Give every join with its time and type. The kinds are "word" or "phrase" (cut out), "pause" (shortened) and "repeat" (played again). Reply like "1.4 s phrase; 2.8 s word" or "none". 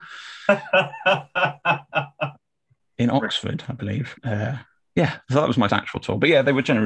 4.2 s pause; 5.7 s word